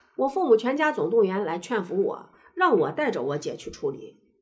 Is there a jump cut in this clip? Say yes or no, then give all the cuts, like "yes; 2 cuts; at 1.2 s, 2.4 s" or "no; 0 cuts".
no; 0 cuts